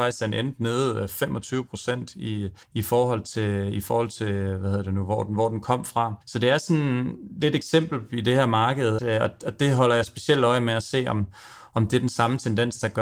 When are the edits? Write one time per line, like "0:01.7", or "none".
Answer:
0:02.6
0:06.2
0:09.0